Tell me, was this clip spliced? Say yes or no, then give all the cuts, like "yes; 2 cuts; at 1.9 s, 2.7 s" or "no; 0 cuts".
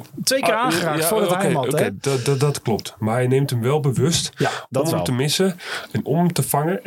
no; 0 cuts